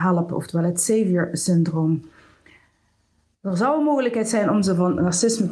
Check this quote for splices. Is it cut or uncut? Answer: uncut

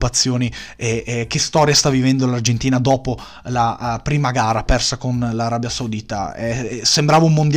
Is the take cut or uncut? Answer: uncut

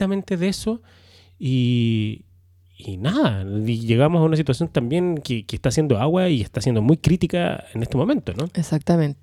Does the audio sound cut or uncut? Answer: uncut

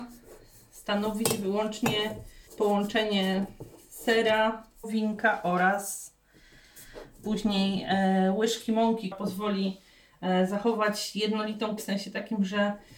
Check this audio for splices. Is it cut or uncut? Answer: cut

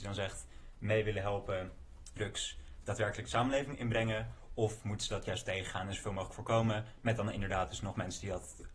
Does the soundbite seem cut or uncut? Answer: cut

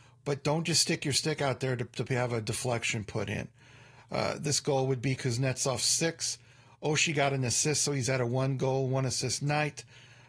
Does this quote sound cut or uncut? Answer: uncut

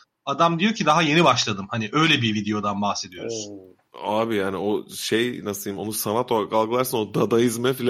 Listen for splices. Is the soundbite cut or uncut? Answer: cut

